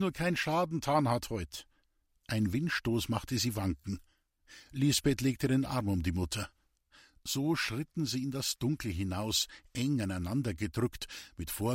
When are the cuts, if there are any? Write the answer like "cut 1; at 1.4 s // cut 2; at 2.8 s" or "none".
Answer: none